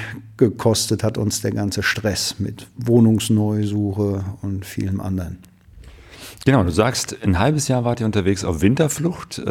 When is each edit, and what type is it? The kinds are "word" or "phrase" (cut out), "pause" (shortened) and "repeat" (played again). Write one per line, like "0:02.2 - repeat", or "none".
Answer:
none